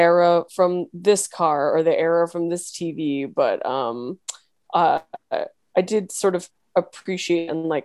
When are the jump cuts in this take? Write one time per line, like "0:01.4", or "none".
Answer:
none